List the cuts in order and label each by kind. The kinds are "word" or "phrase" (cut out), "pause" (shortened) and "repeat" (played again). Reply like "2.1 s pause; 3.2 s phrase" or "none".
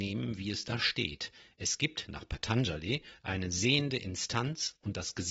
none